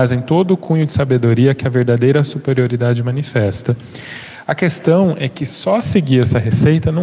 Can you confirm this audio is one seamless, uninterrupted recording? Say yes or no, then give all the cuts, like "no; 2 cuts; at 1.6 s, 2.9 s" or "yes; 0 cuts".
yes; 0 cuts